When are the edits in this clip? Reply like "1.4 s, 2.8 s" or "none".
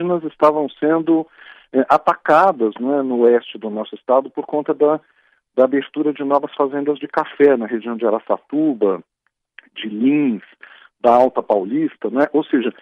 none